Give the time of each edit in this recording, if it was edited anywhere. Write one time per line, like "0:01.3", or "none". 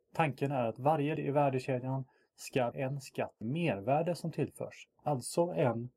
0:01.2
0:02.7
0:03.4
0:04.9